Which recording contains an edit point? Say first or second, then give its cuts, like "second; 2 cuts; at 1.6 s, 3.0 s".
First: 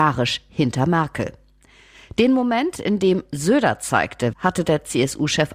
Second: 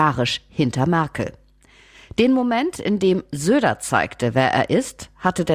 first; 1 cut; at 4.3 s